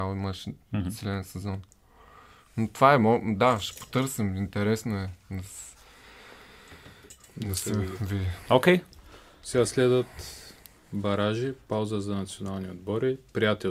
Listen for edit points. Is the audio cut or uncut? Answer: uncut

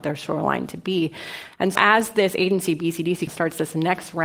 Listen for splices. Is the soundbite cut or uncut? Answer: cut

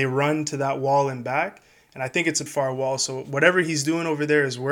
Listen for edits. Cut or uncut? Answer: cut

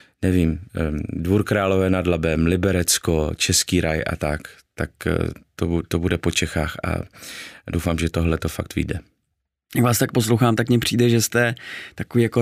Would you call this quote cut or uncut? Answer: uncut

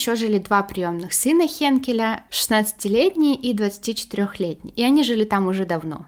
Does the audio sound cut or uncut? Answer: uncut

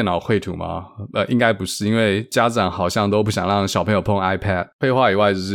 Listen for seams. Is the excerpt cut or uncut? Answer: uncut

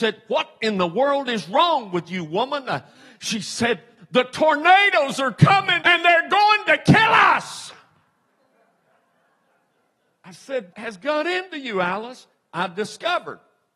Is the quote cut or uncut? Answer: cut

